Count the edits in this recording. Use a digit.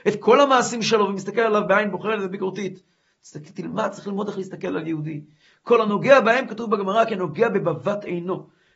0